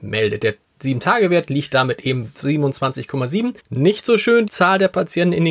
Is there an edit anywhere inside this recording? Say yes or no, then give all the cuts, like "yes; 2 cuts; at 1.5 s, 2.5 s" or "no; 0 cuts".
yes; 3 cuts; at 2.2 s, 3.6 s, 4.5 s